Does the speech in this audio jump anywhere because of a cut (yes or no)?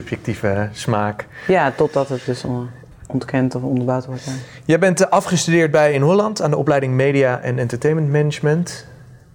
no